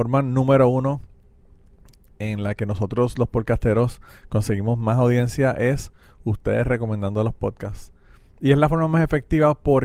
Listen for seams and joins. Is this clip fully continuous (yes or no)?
yes